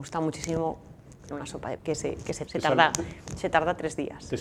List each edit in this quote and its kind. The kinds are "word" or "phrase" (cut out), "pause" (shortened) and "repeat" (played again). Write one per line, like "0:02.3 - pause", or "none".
0:01.3 - word
0:01.8 - word
0:02.5 - word

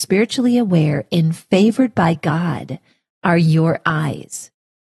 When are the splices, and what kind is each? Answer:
none

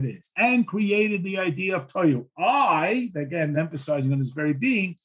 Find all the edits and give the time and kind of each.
0:03.5 - word

